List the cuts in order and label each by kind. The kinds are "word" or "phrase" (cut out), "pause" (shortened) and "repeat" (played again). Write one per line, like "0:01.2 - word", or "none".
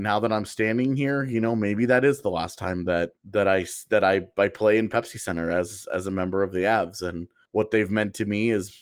0:03.2 - pause
0:07.5 - pause